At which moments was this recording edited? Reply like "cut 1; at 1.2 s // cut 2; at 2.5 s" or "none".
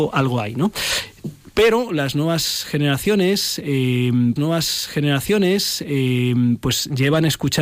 cut 1; at 4.4 s